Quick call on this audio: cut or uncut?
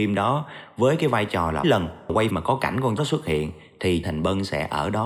cut